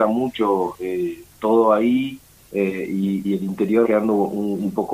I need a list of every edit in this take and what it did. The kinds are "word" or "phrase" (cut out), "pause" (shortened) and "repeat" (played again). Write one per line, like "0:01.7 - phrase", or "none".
0:02.4 - pause
0:03.2 - word
0:03.8 - word